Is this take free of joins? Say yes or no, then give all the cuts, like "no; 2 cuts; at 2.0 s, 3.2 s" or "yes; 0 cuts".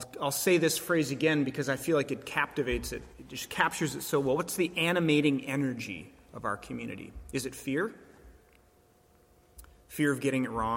yes; 0 cuts